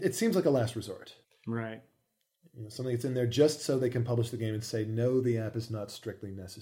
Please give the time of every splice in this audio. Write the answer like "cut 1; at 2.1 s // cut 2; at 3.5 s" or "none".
cut 1; at 1.2 s